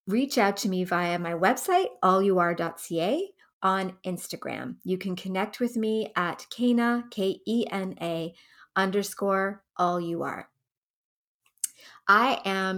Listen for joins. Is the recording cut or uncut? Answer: cut